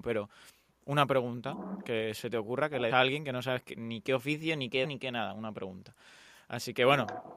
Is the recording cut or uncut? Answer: cut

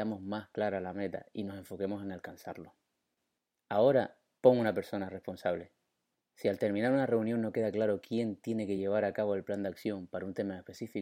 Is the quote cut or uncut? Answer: uncut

